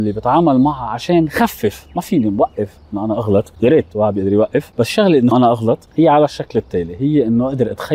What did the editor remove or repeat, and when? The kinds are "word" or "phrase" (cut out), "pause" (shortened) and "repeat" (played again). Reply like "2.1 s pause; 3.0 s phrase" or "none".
5.3 s phrase

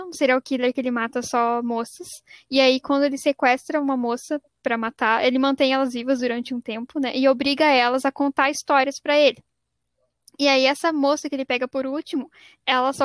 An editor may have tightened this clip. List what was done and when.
none

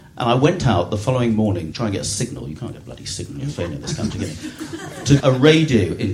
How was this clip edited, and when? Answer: 1.7 s word; 5.2 s word

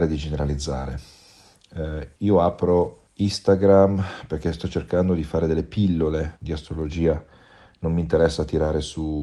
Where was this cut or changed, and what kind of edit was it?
2.1 s pause; 3.1 s pause; 6.4 s word

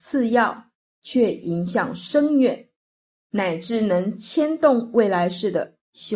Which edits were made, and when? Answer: none

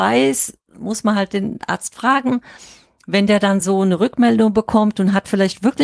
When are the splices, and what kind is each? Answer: none

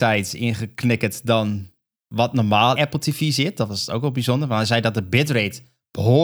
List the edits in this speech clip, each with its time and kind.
2.8 s word

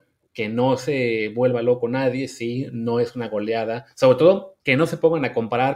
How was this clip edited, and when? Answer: 3.9 s pause; 4.6 s pause

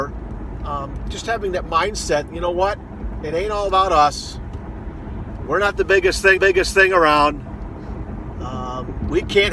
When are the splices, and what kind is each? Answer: 2.3 s word; 6.4 s repeat

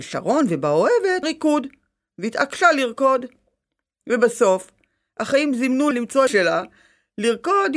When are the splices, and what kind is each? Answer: 1.2 s word; 5.9 s word; 6.3 s phrase

